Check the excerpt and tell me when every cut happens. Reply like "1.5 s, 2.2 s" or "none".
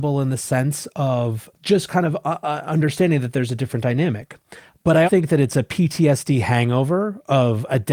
1.5 s, 5.1 s